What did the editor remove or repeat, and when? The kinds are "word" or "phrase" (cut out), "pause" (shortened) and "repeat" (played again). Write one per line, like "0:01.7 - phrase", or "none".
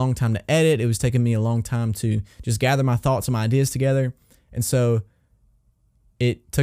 none